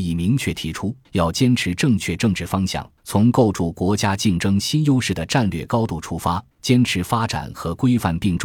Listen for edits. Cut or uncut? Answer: cut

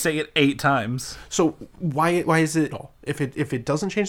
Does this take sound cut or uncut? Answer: cut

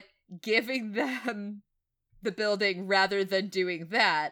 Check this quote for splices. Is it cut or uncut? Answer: uncut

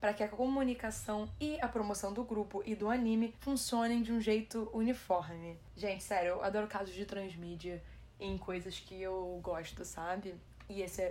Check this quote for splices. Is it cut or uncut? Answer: uncut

